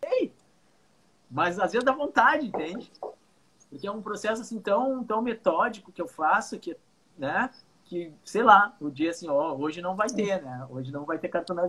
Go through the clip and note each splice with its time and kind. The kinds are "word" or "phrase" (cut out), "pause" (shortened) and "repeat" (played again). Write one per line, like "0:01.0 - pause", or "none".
none